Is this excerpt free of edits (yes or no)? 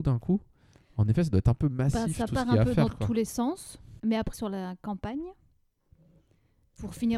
no